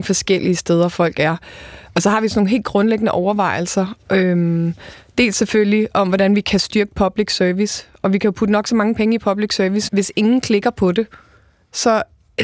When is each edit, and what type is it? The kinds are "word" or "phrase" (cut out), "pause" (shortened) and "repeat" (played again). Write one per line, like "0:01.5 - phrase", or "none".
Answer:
0:09.9 - word